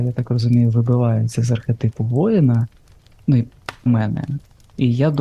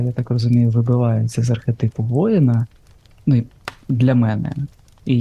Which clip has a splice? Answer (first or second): first